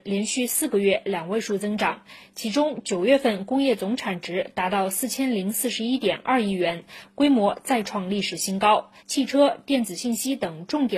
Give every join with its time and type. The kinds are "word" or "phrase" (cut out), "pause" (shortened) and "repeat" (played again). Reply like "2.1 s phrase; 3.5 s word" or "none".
9.0 s pause